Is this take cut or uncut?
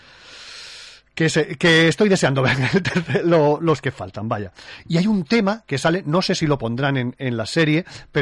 uncut